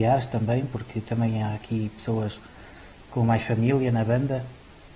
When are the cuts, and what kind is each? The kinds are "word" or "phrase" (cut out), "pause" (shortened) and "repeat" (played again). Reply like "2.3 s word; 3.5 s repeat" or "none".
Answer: none